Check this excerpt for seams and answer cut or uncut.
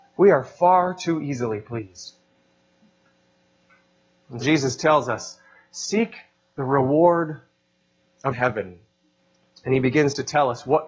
cut